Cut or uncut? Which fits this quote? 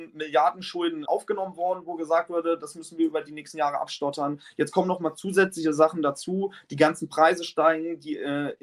cut